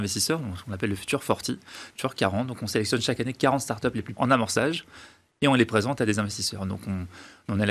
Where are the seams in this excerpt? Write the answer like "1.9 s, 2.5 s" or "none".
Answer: 4.1 s